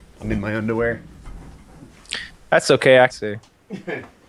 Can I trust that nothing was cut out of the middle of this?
no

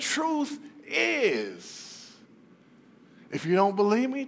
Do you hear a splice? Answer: no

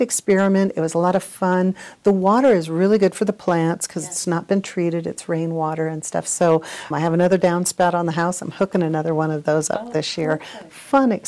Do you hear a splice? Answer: yes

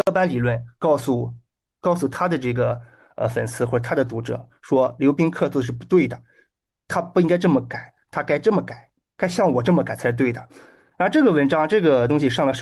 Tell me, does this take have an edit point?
no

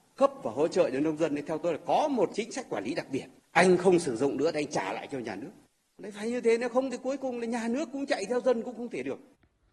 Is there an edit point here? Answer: no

